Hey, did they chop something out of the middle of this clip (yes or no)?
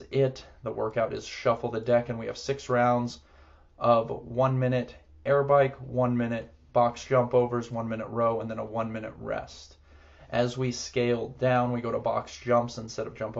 no